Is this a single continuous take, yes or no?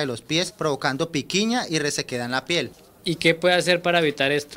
yes